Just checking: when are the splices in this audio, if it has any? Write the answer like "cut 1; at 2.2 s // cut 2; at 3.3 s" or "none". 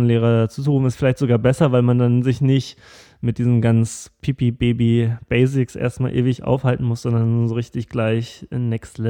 none